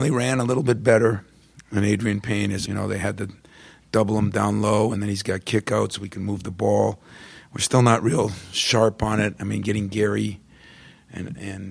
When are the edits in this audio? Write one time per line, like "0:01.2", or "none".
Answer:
0:02.7